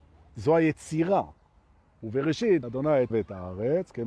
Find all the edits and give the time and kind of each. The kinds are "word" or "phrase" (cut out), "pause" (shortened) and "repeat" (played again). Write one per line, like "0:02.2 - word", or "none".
0:02.6 - word
0:03.1 - word